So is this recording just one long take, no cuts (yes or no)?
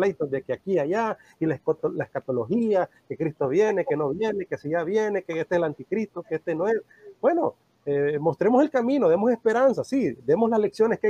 yes